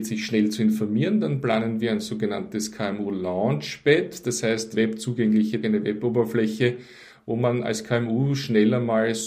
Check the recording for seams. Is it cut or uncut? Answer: cut